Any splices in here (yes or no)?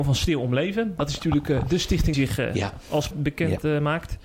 yes